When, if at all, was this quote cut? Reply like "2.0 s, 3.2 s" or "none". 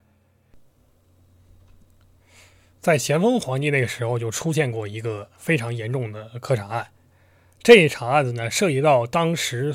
none